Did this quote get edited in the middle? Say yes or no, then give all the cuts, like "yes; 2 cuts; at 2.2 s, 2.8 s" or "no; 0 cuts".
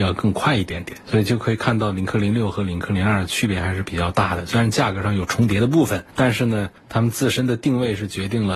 yes; 1 cut; at 6.8 s